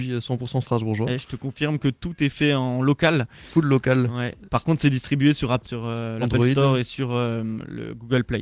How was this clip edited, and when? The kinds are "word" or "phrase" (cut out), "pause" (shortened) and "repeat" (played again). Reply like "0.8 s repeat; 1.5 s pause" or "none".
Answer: 5.6 s word